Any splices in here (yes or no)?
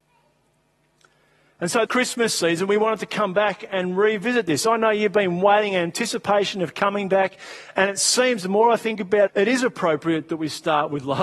yes